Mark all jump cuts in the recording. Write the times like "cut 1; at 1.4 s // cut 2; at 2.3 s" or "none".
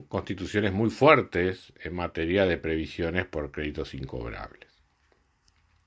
none

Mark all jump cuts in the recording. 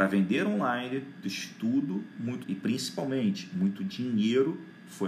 cut 1; at 1.2 s // cut 2; at 2.4 s

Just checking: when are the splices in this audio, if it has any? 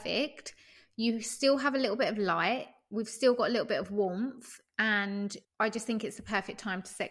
cut 1; at 5.4 s

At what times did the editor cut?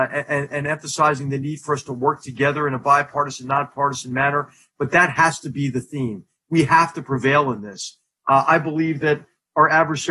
none

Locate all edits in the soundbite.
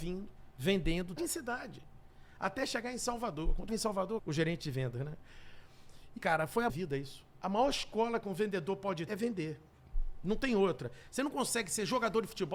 cut 1; at 1.2 s // cut 2; at 3.7 s // cut 3; at 4.2 s // cut 4; at 6.2 s // cut 5; at 6.7 s // cut 6; at 9.1 s

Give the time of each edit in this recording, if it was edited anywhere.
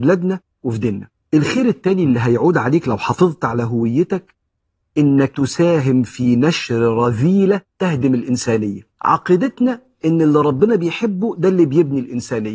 cut 1; at 5.3 s // cut 2; at 8.9 s

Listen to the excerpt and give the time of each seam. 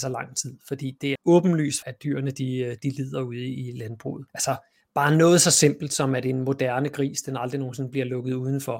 cut 1; at 1.2 s // cut 2; at 1.8 s // cut 3; at 4.3 s

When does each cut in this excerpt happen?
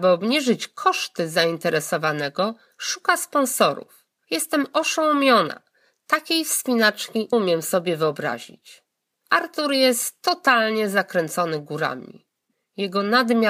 cut 1; at 7.3 s

